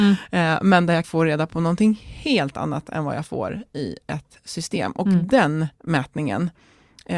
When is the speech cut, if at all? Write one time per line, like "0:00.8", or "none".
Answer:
0:01.0
0:05.7